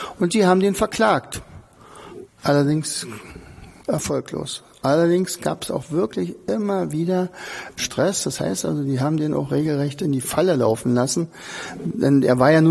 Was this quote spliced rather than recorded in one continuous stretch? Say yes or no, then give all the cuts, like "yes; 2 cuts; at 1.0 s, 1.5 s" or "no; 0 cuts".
yes; 1 cut; at 7.8 s